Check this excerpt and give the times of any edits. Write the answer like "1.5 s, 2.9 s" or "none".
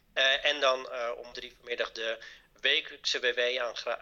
1.3 s